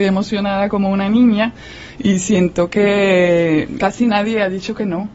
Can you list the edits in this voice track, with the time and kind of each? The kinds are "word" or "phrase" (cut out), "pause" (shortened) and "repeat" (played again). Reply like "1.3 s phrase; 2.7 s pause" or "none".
3.8 s word